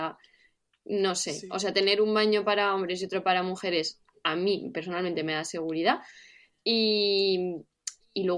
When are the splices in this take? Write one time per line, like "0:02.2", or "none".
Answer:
none